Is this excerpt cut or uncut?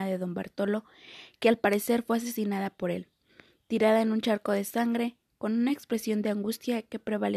uncut